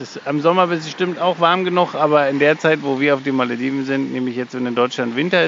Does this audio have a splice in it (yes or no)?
no